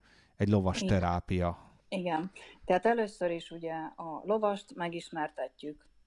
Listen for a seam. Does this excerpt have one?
yes; 1 cut; at 1.8 s

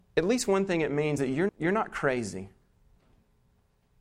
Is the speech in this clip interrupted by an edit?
yes; 2 cuts; at 1.2 s, 1.5 s

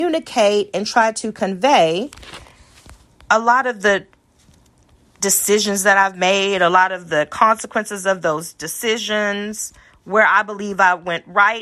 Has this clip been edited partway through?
no; 0 cuts

